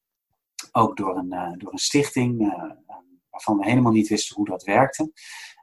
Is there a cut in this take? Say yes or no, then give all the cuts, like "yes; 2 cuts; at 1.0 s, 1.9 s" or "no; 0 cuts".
no; 0 cuts